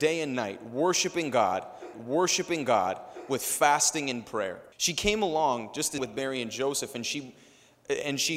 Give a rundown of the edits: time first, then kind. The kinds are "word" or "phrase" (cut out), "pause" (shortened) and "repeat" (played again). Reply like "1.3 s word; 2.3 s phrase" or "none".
1.9 s repeat; 4.7 s pause; 6.0 s phrase